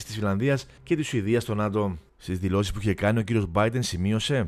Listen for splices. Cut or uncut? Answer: cut